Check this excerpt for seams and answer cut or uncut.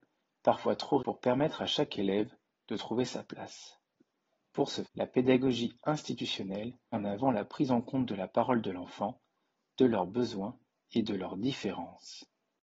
cut